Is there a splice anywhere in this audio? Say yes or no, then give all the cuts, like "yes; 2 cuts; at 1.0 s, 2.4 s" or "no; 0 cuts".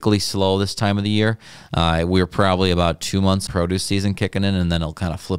yes; 1 cut; at 3.5 s